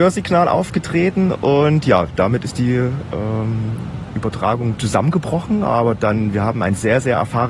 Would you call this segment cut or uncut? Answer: uncut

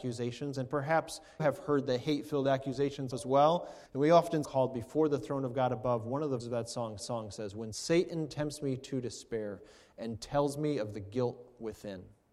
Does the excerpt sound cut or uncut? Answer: cut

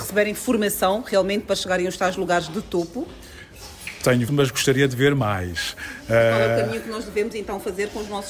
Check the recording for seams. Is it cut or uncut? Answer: cut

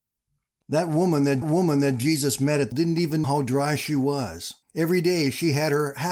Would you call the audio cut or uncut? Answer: cut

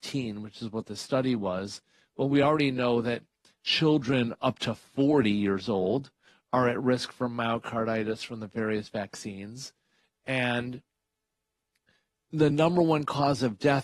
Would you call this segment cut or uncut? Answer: uncut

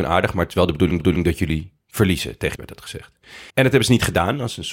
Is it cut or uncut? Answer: cut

